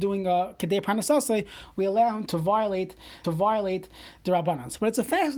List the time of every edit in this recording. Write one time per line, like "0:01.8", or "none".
0:02.3
0:03.2